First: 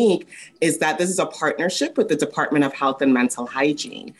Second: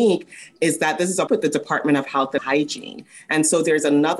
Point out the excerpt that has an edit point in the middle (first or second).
second